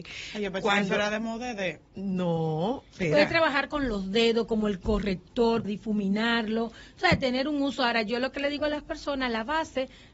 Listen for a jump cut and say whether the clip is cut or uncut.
cut